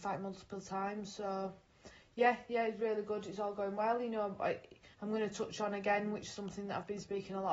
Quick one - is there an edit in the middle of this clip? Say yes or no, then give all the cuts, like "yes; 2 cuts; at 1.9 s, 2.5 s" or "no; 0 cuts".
yes; 1 cut; at 4.9 s